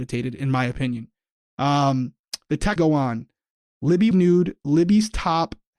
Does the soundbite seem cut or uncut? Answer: cut